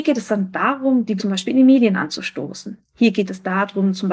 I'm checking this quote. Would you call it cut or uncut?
cut